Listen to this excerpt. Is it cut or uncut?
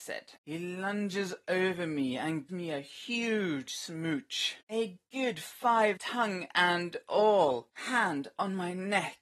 cut